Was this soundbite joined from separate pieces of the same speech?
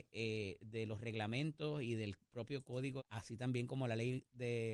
yes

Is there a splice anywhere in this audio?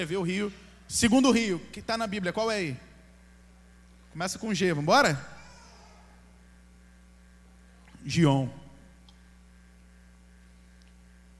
no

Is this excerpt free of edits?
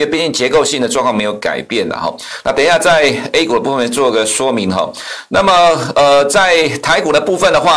yes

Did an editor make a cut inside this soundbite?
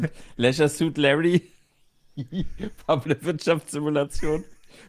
yes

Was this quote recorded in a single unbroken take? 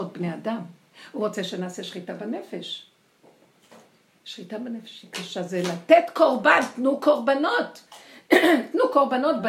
yes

